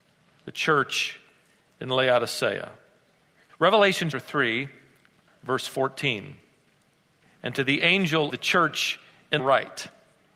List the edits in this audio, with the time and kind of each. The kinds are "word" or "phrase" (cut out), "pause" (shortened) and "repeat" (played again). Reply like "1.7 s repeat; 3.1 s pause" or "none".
4.1 s word; 8.3 s word; 9.4 s word